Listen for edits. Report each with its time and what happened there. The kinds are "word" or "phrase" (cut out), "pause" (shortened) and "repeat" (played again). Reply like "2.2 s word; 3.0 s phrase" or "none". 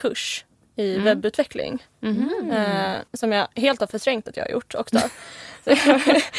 3.1 s pause